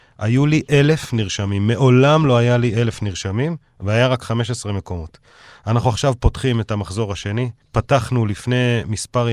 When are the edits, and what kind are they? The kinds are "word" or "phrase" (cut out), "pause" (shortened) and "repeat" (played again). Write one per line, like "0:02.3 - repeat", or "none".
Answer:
0:07.6 - pause